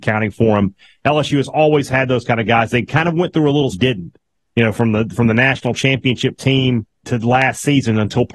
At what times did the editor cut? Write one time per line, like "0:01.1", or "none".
0:03.7
0:07.0

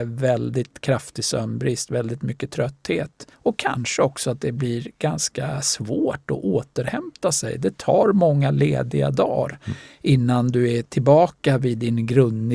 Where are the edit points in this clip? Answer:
0:03.3

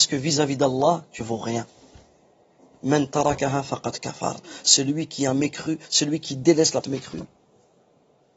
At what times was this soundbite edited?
0:01.2
0:06.8

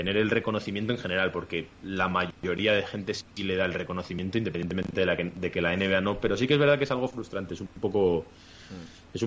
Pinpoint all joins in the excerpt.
0:01.7

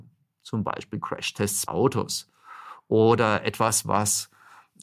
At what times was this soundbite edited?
0:01.7

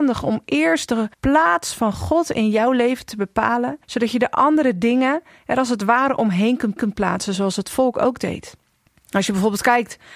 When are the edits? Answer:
0:01.1
0:03.8
0:06.8
0:08.9

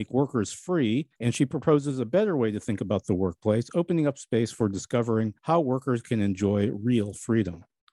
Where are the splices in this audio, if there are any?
0:01.1
0:05.4

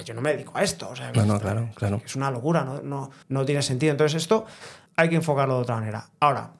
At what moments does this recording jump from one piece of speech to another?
0:03.2
0:04.9

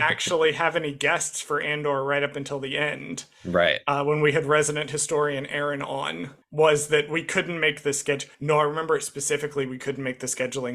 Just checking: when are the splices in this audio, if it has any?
0:08.3

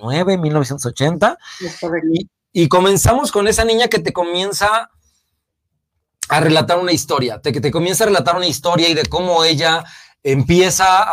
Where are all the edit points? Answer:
none

